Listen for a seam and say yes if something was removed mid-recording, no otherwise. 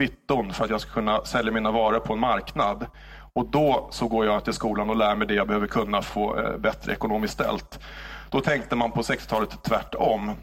yes